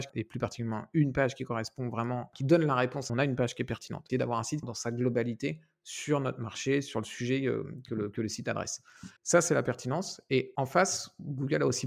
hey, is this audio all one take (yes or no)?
no